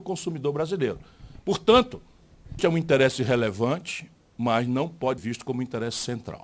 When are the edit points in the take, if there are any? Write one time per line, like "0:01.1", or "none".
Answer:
0:02.6
0:05.2